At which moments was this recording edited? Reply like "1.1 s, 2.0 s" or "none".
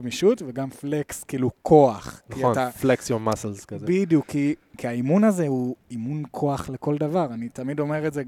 1.6 s